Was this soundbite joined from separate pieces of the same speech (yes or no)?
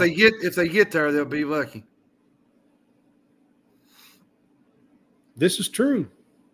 no